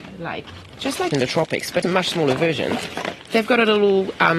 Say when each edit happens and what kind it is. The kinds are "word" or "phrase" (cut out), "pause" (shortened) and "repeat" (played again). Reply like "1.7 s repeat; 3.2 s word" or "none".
1.1 s phrase; 1.8 s word